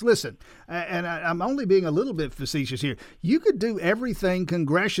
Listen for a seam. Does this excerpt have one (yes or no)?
no